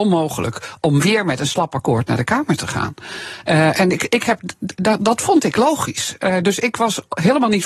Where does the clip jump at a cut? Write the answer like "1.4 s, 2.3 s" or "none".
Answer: none